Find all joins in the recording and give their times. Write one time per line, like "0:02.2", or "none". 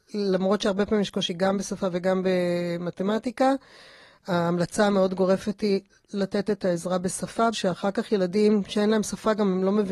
0:07.5